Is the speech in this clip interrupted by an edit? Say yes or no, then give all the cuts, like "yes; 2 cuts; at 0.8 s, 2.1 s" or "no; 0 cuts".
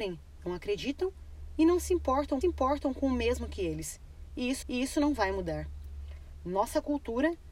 yes; 2 cuts; at 2.4 s, 4.6 s